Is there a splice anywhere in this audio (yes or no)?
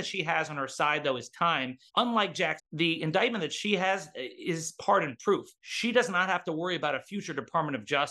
yes